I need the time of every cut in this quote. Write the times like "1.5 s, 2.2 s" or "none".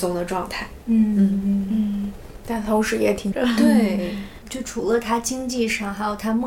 3.3 s, 4.4 s